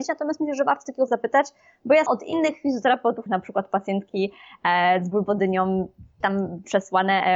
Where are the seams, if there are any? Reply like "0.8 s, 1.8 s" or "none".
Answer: 1.1 s, 2.1 s, 3.3 s, 6.2 s